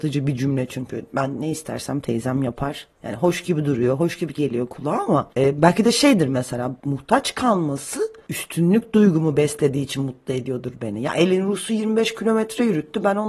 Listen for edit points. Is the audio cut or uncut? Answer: uncut